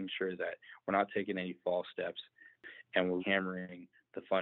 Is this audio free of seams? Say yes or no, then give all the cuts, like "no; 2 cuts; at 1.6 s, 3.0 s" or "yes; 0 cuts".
no; 1 cut; at 3.2 s